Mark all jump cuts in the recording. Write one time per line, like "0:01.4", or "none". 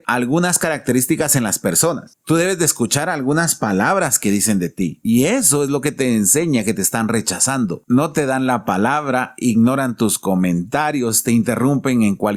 none